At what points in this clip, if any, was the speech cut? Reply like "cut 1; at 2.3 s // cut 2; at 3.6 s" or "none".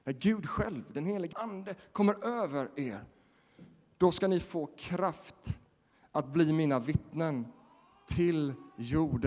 cut 1; at 1.3 s

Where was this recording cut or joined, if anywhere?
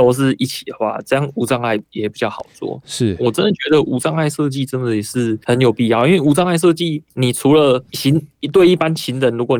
cut 1; at 5.4 s // cut 2; at 7.1 s // cut 3; at 7.9 s

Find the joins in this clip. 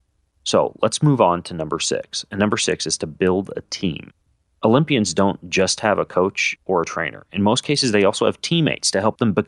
none

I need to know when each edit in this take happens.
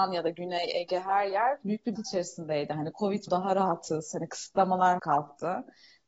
cut 1; at 2.0 s // cut 2; at 3.3 s // cut 3; at 5.0 s

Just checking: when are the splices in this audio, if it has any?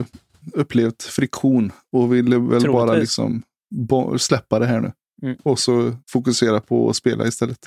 cut 1; at 6.0 s

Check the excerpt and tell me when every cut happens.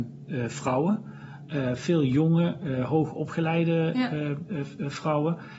none

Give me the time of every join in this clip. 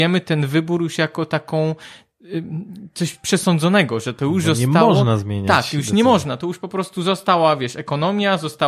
none

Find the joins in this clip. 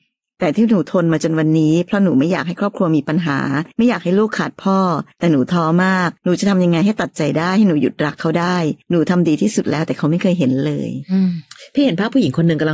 cut 1; at 3.7 s // cut 2; at 5.1 s // cut 3; at 6.2 s // cut 4; at 8.8 s

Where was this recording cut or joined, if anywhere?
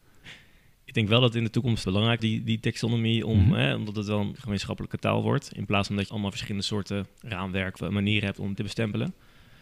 cut 1; at 1.8 s // cut 2; at 2.2 s // cut 3; at 4.4 s // cut 4; at 6.1 s // cut 5; at 7.8 s // cut 6; at 8.5 s

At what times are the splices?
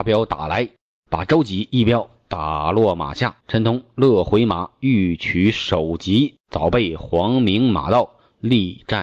cut 1; at 3.4 s // cut 2; at 6.4 s

